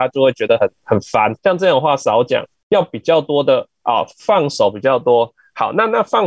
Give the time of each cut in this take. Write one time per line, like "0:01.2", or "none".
0:01.4